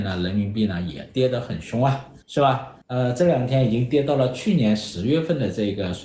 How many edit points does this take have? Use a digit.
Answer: 2